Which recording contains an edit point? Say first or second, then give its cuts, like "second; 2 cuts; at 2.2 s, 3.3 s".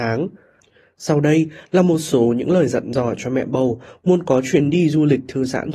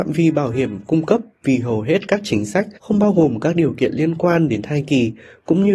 second; 1 cut; at 2.8 s